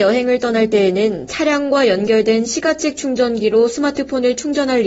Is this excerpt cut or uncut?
uncut